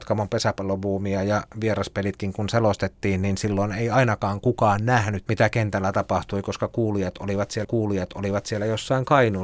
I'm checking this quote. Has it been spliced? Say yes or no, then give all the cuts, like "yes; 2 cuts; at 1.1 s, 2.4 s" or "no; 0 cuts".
yes; 2 cuts; at 5.2 s, 7.6 s